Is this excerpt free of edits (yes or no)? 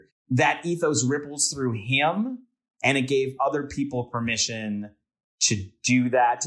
yes